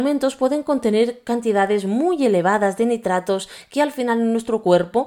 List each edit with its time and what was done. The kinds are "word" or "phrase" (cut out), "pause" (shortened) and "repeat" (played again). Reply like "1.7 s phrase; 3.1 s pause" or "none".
none